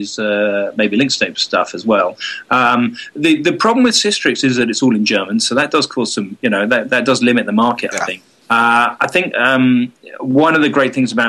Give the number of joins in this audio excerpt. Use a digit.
1